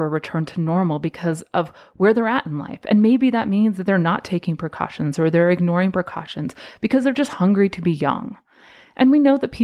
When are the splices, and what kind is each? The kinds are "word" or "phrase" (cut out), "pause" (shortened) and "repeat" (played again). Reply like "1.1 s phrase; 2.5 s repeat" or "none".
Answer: none